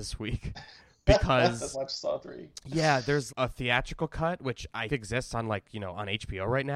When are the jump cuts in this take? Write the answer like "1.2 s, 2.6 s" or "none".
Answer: 1.7 s, 3.3 s, 4.9 s